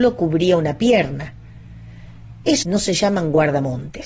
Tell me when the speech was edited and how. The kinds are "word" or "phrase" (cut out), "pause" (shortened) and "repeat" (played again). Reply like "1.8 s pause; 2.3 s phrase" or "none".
2.6 s phrase